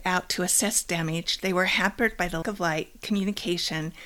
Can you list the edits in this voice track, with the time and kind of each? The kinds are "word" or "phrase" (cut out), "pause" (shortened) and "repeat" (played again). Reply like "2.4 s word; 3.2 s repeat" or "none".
2.4 s word